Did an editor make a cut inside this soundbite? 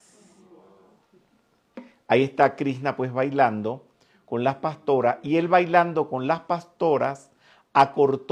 no; 0 cuts

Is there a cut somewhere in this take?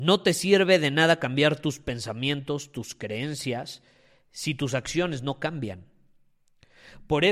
no; 0 cuts

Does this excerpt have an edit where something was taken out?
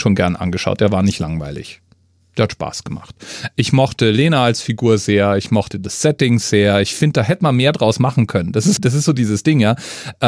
yes; 1 cut; at 8.8 s

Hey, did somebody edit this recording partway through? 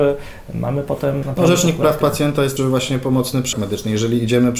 yes; 3 cuts; at 1.2 s, 2.6 s, 3.5 s

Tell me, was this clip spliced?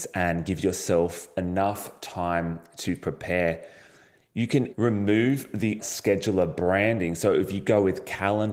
yes; 2 cuts; at 4.7 s, 5.8 s

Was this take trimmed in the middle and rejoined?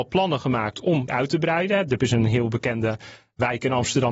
yes; 2 cuts; at 1.1 s, 2.0 s

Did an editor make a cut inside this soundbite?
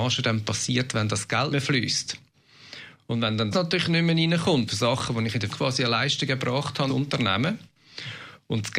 yes; 5 cuts; at 1.5 s, 3.5 s, 4.7 s, 5.5 s, 6.9 s

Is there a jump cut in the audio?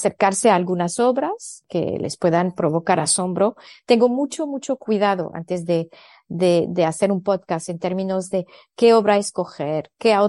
no; 0 cuts

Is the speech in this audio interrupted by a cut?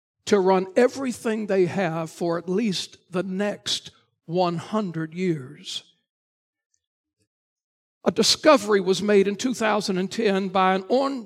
no; 0 cuts

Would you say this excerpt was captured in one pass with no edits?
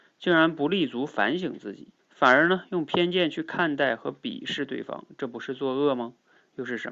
no; 1 cut; at 2.0 s

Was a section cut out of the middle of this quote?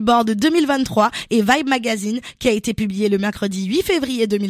no; 0 cuts

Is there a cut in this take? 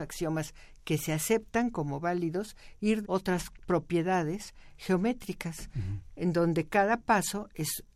yes; 1 cut; at 3.0 s

